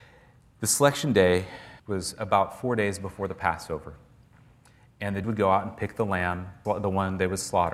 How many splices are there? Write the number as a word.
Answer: three